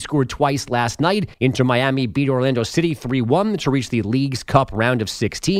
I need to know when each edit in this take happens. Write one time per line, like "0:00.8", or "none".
0:01.3